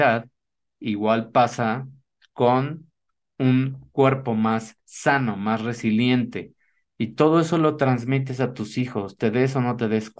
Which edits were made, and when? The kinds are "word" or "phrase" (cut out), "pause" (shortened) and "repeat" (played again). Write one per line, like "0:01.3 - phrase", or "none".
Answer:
none